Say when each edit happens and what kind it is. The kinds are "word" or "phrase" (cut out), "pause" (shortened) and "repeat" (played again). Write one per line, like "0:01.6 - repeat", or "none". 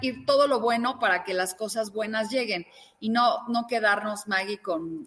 none